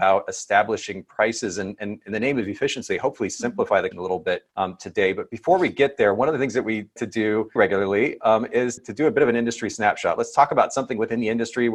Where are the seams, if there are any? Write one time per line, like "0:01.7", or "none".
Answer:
0:03.9
0:04.5
0:07.0
0:07.6
0:08.8